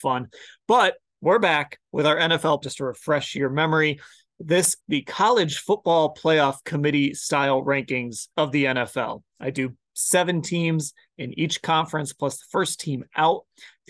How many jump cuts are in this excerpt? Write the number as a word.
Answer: three